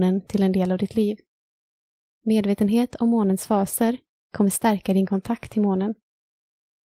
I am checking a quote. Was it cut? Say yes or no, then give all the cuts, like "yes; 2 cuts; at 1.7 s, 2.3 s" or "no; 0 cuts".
no; 0 cuts